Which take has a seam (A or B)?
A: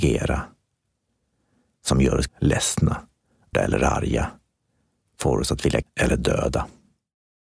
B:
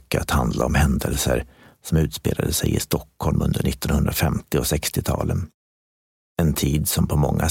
A